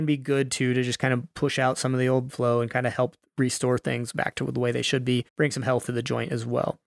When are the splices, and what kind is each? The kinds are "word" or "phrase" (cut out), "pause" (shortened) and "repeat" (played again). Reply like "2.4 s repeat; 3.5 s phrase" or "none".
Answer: 2.3 s word; 5.3 s pause; 5.9 s word